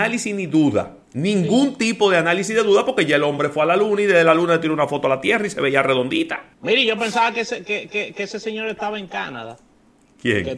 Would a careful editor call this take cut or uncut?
cut